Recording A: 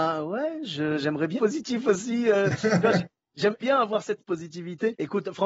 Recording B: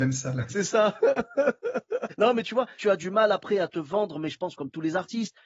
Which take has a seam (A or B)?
A